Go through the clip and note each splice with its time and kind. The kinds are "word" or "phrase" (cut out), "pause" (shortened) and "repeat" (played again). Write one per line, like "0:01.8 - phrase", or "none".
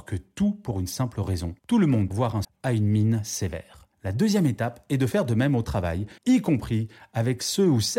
0:01.6 - pause
0:02.1 - word
0:02.4 - word
0:03.9 - pause
0:06.2 - pause